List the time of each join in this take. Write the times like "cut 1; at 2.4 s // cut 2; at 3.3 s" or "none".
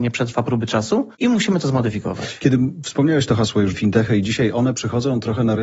cut 1; at 1.1 s // cut 2; at 3.7 s